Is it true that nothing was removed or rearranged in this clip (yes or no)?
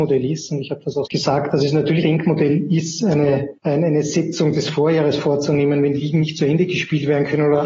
no